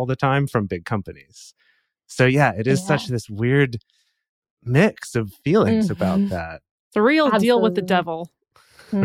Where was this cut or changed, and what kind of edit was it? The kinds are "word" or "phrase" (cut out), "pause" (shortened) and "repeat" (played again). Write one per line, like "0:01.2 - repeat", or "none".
none